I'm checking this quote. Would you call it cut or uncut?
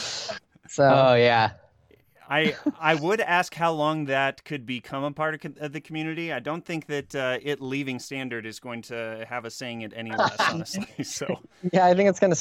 uncut